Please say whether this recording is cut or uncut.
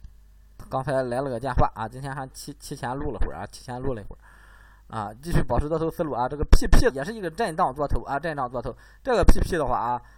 cut